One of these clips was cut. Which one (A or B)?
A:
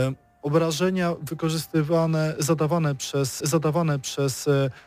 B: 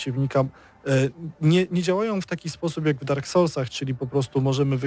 A